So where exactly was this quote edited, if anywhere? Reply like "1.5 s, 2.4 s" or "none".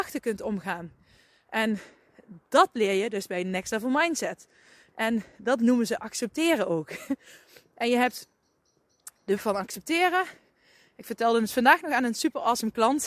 9.4 s